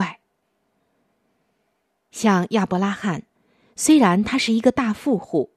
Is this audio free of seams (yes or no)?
yes